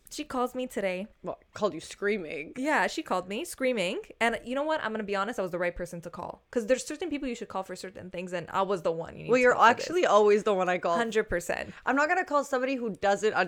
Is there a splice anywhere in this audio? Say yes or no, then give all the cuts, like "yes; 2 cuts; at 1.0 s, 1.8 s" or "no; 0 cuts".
yes; 1 cut; at 1.1 s